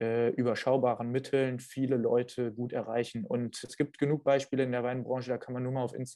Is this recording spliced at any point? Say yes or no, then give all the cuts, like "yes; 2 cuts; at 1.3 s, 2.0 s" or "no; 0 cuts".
yes; 1 cut; at 3.6 s